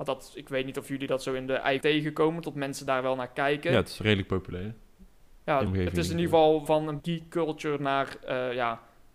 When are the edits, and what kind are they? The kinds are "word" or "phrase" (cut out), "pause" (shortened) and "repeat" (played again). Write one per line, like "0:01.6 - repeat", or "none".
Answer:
0:01.8 - word
0:05.7 - word
0:06.7 - word
0:07.0 - word

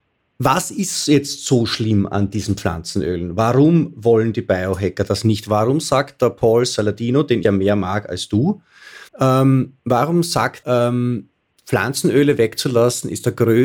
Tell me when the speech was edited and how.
0:07.4 - word
0:09.1 - pause
0:10.6 - word

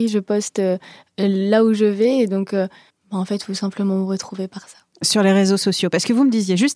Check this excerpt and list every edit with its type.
0:02.9 - pause

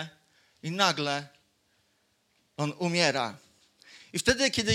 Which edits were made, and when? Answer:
none

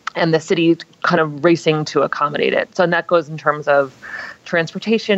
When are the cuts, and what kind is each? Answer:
none

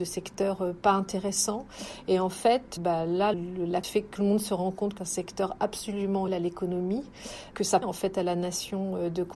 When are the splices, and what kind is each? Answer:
0:02.8 - word
0:03.3 - word
0:03.8 - word
0:04.2 - word
0:05.0 - word
0:06.3 - word
0:07.5 - word
0:07.8 - word

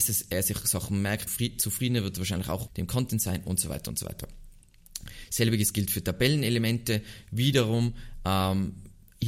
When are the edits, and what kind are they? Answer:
0:01.3 - word
0:02.7 - word

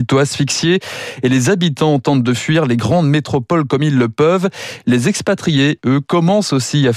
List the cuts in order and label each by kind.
none

